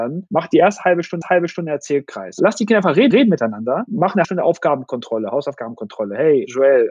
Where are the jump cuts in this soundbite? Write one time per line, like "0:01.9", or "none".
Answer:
0:01.2
0:03.1
0:04.2